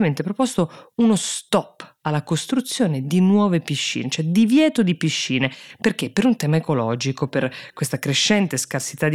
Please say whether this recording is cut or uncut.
uncut